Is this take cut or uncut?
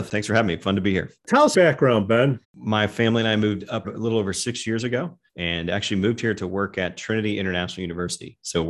cut